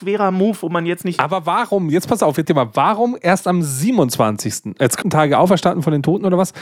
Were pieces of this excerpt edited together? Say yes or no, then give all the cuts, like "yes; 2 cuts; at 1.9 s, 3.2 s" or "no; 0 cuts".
yes; 2 cuts; at 2.4 s, 5.0 s